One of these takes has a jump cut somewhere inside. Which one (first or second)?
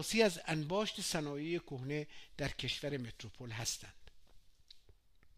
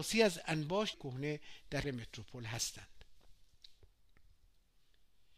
second